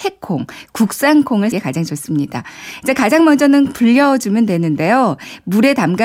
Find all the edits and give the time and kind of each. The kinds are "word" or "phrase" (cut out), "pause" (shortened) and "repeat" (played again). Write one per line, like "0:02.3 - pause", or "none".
0:01.5 - word
0:03.7 - word